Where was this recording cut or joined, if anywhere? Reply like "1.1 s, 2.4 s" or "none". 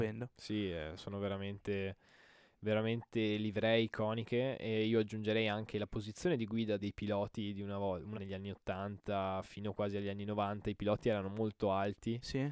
1.0 s, 6.8 s, 8.1 s